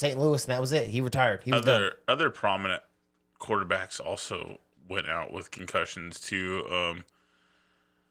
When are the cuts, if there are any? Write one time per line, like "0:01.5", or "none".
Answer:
none